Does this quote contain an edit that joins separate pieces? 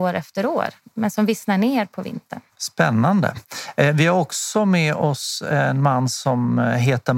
yes; 1 cut; at 2.5 s

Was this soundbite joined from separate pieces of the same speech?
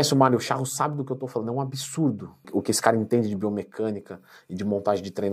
no; 0 cuts

